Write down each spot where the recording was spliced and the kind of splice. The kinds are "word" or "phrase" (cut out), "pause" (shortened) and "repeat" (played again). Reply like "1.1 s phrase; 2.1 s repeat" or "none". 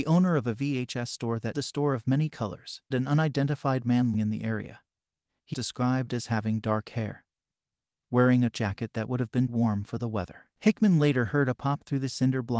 1.5 s word; 2.9 s word; 4.1 s word; 5.5 s word; 8.5 s word; 9.5 s word